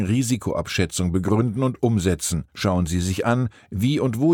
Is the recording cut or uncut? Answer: cut